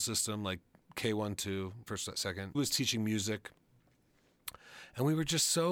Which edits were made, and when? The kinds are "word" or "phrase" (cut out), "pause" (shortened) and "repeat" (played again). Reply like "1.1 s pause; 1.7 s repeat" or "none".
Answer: 1.9 s word; 2.5 s word